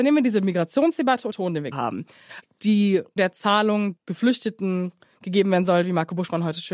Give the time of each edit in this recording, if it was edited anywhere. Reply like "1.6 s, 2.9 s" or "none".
1.3 s, 1.7 s, 3.2 s, 4.0 s